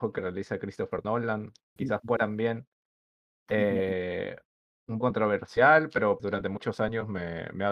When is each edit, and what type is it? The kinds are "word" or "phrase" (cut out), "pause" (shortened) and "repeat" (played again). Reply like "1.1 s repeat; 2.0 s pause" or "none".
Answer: 1.8 s word; 2.2 s word; 5.0 s word; 6.2 s word